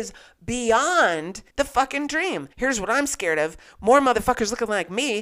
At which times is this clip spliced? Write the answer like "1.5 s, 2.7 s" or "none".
1.5 s, 2.5 s